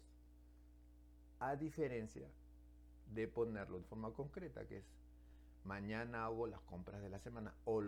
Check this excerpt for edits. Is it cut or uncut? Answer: cut